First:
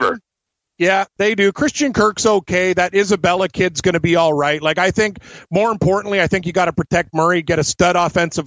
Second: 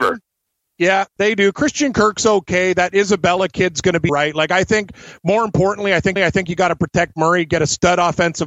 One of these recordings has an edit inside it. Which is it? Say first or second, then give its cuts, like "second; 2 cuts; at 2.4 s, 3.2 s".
second; 2 cuts; at 4.1 s, 6.2 s